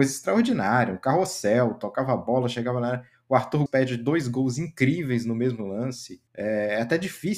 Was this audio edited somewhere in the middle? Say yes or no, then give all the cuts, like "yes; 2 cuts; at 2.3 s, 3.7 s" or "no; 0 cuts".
yes; 2 cuts; at 3.7 s, 6.3 s